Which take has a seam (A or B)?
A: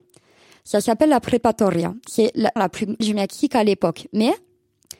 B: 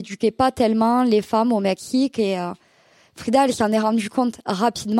A